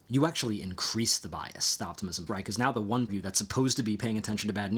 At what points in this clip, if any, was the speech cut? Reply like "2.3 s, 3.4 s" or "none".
2.3 s, 3.1 s